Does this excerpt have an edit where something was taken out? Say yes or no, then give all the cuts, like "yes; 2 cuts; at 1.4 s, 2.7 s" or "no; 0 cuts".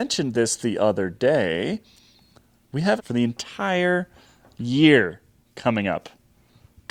yes; 1 cut; at 3.0 s